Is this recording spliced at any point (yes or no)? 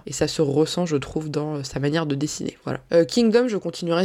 no